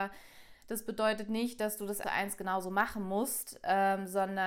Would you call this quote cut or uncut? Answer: cut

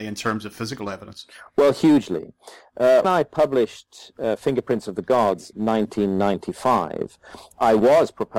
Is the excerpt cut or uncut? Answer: cut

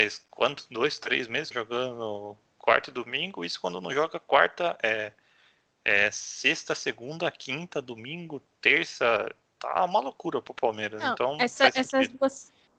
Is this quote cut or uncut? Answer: cut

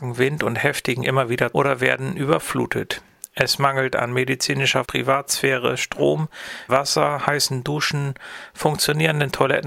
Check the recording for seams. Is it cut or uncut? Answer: cut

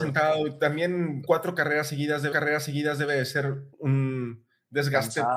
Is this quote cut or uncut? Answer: cut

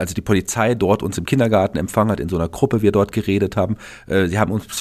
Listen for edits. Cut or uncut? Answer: uncut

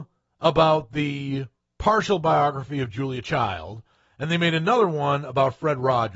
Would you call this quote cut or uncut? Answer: uncut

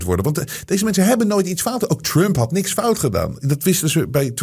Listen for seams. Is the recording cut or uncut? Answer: uncut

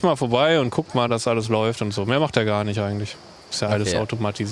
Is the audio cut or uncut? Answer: uncut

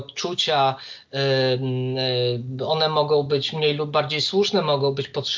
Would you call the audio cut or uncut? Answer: uncut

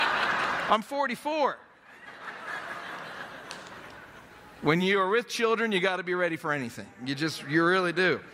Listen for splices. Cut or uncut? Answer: uncut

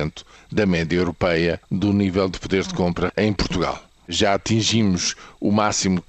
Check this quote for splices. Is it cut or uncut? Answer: cut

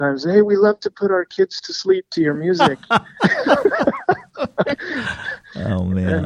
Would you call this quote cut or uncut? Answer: uncut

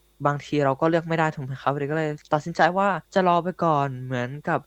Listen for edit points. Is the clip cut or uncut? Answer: cut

